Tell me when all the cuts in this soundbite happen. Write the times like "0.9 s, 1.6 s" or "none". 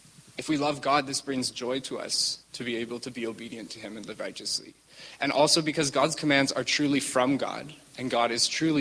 2.5 s